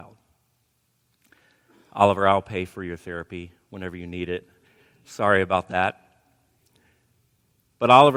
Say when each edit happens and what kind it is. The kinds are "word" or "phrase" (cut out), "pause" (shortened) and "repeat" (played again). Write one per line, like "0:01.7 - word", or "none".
none